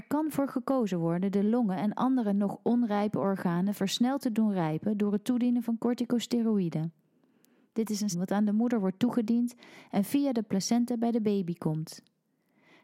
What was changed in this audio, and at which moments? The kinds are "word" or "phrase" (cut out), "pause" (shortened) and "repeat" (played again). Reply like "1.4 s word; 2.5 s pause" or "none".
8.1 s word